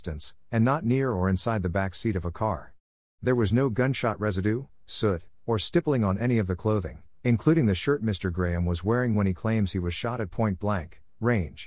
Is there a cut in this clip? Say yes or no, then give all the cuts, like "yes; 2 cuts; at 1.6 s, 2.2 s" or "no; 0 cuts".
no; 0 cuts